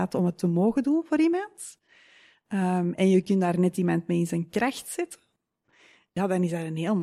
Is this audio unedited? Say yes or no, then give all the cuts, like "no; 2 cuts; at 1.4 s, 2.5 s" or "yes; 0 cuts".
yes; 0 cuts